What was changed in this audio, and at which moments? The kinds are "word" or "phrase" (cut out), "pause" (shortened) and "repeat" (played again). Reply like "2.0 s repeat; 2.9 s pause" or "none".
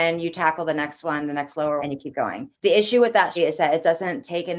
1.8 s word; 2.5 s pause; 3.4 s word